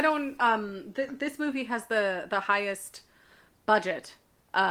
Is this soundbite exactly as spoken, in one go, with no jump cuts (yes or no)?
yes